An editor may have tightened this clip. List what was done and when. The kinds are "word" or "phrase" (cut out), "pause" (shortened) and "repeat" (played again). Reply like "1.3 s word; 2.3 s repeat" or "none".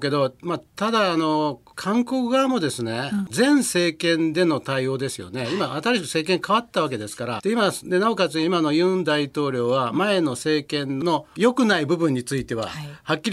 3.3 s phrase; 7.4 s phrase; 11.3 s pause